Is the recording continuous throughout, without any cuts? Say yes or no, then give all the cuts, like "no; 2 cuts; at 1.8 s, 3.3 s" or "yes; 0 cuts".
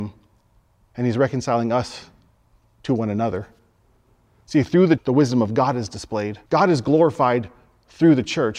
no; 2 cuts; at 5.0 s, 6.5 s